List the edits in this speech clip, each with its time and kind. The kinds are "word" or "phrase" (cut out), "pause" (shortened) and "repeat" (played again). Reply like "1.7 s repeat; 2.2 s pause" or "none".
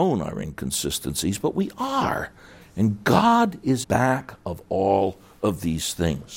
3.8 s word